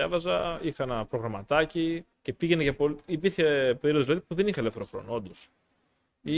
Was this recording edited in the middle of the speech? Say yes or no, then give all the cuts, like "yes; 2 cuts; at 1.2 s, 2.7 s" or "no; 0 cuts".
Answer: yes; 1 cut; at 2.1 s